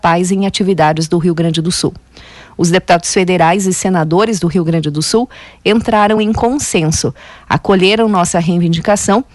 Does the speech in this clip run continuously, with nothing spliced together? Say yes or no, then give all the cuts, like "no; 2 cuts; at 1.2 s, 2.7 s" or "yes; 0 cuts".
yes; 0 cuts